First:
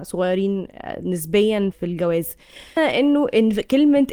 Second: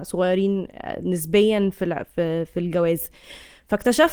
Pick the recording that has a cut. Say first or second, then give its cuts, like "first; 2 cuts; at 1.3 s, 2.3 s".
first; 2 cuts; at 1.7 s, 2.8 s